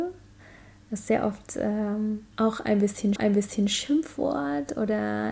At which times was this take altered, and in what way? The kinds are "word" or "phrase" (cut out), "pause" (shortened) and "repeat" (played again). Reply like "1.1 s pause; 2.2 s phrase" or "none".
2.3 s pause; 3.2 s repeat

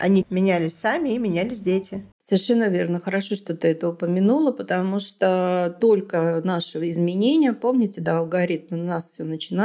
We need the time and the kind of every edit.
2.1 s pause

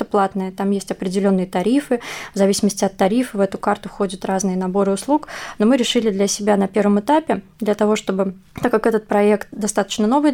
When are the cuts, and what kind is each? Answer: none

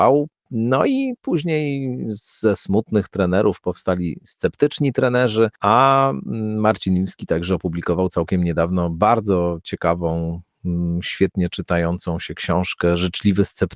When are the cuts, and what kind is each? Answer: none

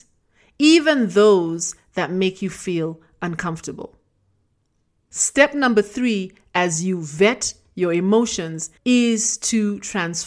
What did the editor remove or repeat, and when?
8.8 s pause

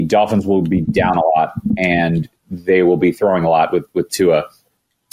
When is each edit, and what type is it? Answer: none

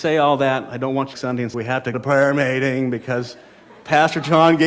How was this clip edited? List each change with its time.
1.1 s phrase; 1.5 s word; 1.9 s word

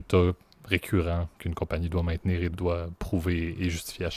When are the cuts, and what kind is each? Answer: 2.5 s word

